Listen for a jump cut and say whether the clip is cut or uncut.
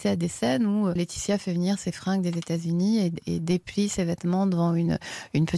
uncut